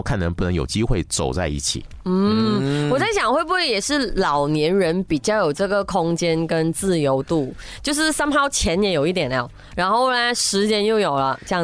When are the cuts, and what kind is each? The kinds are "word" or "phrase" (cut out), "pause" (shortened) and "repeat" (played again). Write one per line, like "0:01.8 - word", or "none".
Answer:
none